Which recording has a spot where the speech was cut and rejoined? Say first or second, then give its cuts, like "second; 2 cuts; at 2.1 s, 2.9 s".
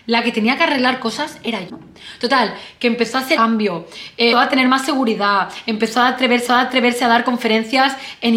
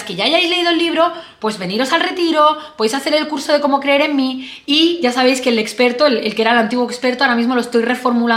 first; 4 cuts; at 1.7 s, 3.4 s, 4.3 s, 6.5 s